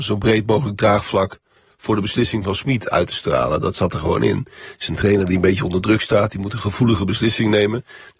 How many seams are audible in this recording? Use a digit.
0